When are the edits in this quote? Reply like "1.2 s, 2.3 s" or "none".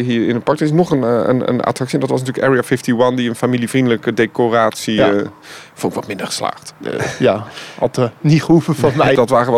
6.8 s